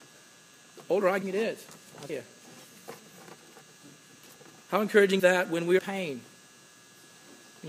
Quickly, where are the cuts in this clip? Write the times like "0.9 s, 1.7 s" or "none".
1.2 s, 2.1 s, 5.2 s, 5.8 s